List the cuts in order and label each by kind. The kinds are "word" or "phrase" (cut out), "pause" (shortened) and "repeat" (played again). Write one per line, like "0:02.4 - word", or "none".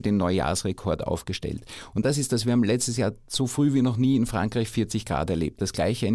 none

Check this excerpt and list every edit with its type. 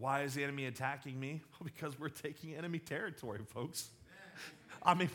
none

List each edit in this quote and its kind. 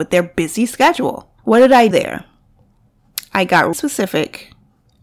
0:01.4 - pause
0:01.9 - word
0:03.7 - word

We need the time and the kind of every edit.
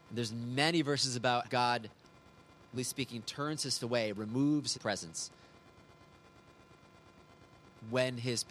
0:01.4 - word
0:02.8 - word
0:03.8 - word
0:04.7 - word

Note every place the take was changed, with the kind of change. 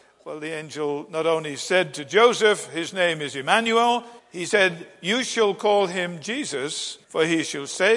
0:04.2 - pause
0:07.0 - pause

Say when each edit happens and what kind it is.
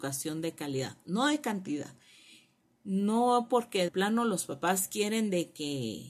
0:03.9 - word

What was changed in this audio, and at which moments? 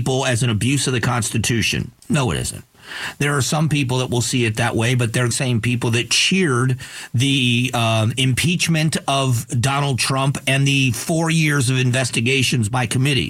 0:05.3 - word

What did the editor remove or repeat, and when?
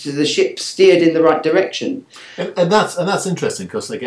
none

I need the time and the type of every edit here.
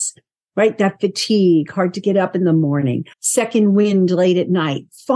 0:03.1 - pause

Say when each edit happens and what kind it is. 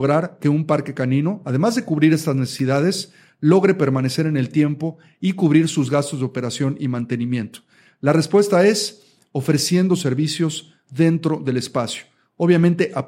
none

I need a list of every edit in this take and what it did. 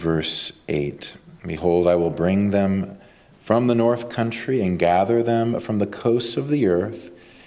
none

